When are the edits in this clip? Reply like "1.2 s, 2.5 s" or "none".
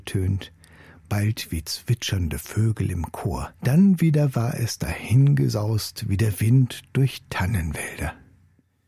3.6 s